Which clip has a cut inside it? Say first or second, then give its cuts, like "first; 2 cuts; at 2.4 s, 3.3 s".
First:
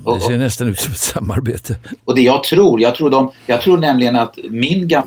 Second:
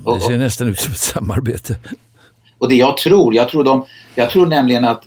first; 2 cuts; at 2.0 s, 3.3 s